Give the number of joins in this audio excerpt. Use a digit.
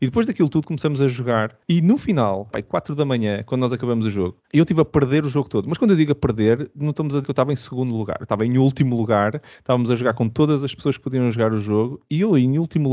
4